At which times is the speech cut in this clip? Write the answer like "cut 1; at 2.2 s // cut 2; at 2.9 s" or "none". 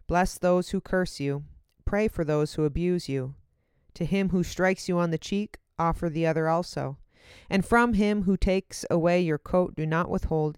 none